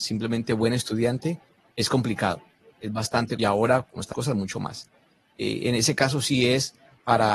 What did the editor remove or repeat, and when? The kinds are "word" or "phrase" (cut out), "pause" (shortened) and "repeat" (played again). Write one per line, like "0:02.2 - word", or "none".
0:03.4 - phrase
0:04.1 - word